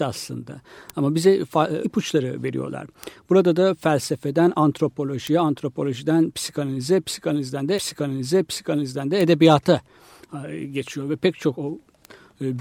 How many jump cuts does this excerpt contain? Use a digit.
2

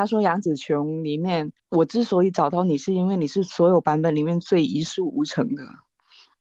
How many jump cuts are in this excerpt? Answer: 1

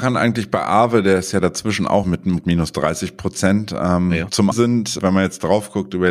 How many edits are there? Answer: 4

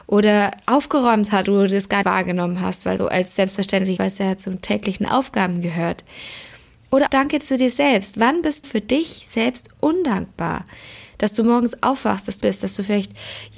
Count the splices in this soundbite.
7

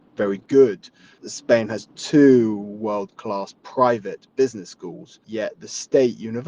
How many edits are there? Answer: 0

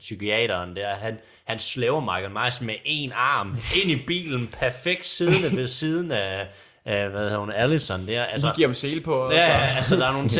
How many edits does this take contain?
0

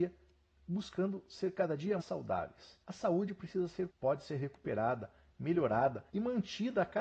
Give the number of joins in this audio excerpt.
4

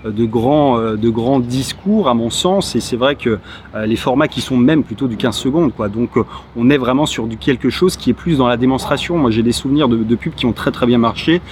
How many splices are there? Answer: 1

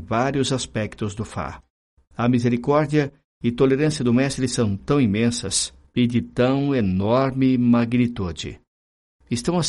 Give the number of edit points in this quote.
0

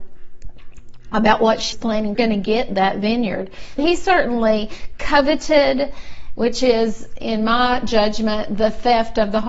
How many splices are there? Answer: 3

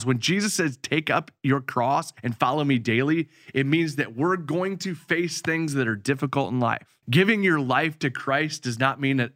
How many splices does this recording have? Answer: 2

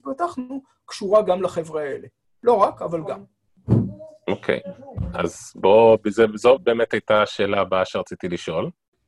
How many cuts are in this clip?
0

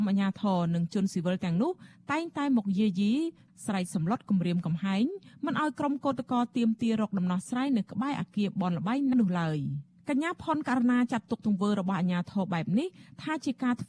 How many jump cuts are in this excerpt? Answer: 1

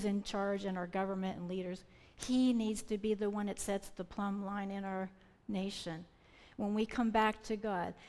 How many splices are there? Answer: 0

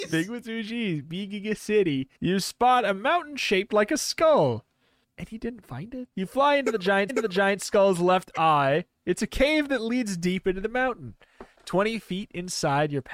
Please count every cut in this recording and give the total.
4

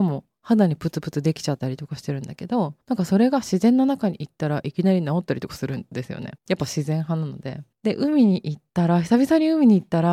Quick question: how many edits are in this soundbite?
4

